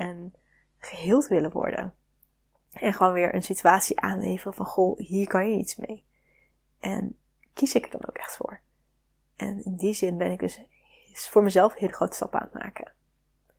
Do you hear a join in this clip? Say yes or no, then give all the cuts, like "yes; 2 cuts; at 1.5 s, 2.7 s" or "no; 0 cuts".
no; 0 cuts